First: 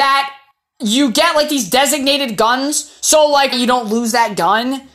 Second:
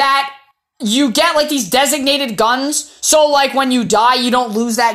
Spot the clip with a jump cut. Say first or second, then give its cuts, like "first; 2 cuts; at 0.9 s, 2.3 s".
first; 1 cut; at 3.5 s